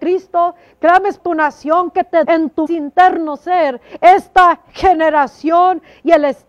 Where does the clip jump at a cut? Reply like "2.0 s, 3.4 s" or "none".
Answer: 1.2 s, 2.2 s, 2.7 s